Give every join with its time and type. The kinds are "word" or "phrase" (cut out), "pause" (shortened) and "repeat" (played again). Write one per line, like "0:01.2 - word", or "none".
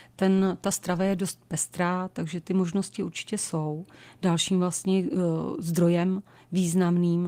none